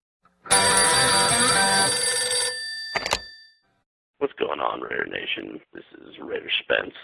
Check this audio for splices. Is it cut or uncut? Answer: cut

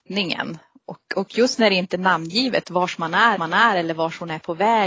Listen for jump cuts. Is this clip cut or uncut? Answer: cut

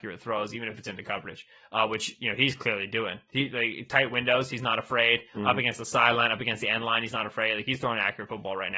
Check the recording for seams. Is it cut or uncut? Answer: uncut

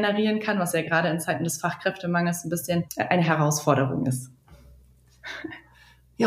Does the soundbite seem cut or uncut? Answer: cut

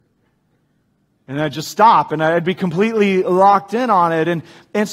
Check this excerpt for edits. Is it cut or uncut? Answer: uncut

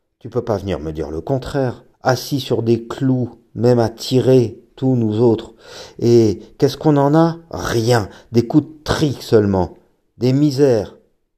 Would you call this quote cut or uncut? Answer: cut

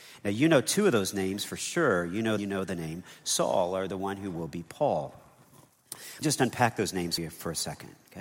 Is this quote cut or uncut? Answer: cut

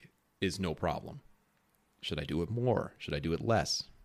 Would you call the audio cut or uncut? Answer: uncut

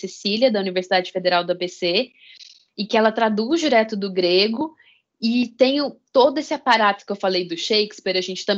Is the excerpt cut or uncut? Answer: uncut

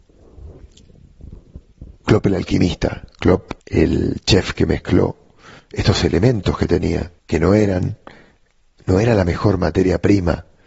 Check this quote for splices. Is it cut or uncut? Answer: cut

